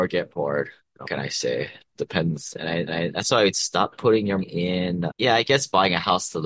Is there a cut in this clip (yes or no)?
yes